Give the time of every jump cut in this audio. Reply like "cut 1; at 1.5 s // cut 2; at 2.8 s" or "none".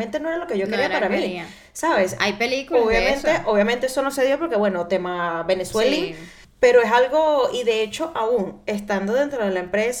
cut 1; at 6.4 s